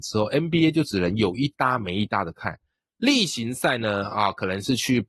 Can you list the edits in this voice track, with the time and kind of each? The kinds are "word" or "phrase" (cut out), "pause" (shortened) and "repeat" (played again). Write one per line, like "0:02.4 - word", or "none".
none